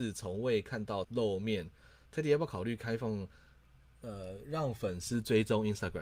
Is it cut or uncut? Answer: cut